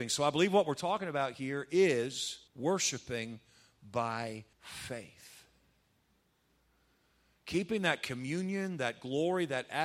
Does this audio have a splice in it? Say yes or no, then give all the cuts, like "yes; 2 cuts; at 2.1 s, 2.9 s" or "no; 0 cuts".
yes; 2 cuts; at 2.5 s, 4.5 s